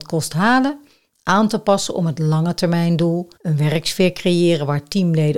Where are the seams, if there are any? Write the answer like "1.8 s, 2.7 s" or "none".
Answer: 3.3 s

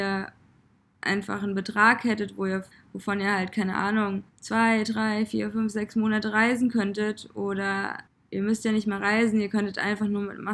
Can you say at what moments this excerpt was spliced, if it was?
2.7 s, 4.3 s, 8.1 s

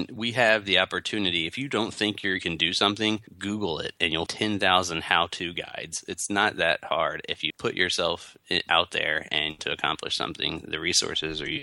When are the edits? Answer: 2.4 s, 3.3 s, 4.3 s, 7.5 s, 9.6 s

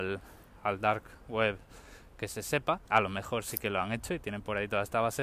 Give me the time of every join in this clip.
2.9 s

